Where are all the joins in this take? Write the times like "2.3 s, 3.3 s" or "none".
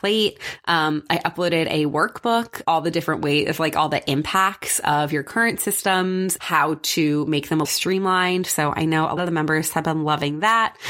2.6 s, 6.4 s, 7.6 s, 9.2 s